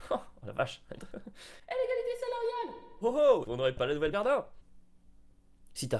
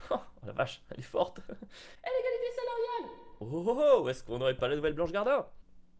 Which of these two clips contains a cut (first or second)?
first